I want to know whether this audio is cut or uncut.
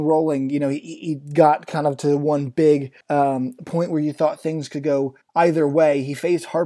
cut